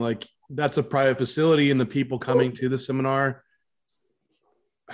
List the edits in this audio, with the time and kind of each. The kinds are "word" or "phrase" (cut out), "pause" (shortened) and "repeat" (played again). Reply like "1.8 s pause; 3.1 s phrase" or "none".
none